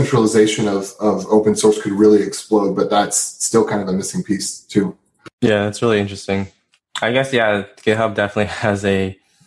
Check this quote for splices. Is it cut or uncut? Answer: uncut